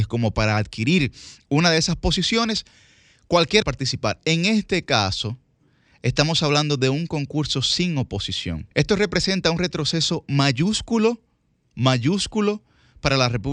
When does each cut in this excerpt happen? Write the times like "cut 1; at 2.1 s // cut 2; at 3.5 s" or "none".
cut 1; at 3.6 s // cut 2; at 8.7 s

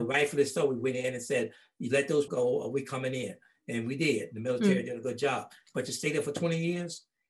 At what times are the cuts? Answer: cut 1; at 2.3 s

